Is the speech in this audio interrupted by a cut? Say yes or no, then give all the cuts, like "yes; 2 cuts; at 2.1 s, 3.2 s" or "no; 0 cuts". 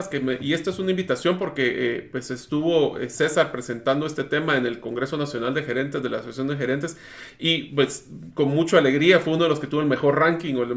no; 0 cuts